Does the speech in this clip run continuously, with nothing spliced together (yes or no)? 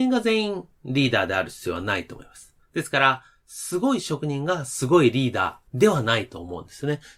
no